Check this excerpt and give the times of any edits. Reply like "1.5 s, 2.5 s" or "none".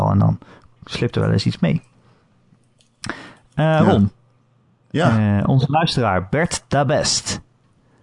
none

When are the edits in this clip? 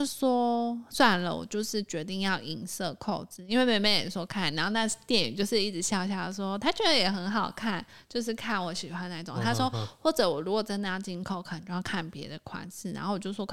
none

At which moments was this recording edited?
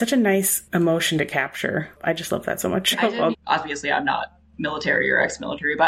2.9 s, 3.3 s

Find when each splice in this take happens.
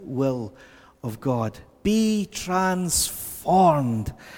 none

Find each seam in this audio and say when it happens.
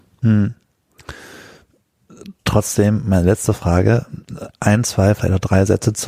2.4 s, 4.5 s

